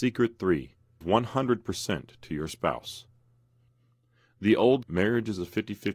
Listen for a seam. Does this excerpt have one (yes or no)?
yes